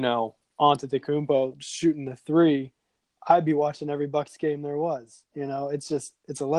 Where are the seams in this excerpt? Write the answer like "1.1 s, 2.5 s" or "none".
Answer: none